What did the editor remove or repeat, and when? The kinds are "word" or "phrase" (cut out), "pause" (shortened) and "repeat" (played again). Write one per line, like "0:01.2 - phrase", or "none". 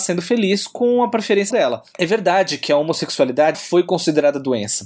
0:01.5 - word
0:03.5 - word